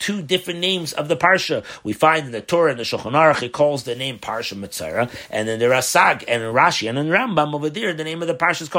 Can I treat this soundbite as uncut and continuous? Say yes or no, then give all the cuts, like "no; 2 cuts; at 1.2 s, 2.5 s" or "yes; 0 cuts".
yes; 0 cuts